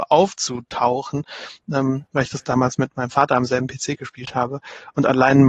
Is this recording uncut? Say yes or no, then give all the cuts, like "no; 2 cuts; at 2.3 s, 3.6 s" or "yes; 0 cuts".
yes; 0 cuts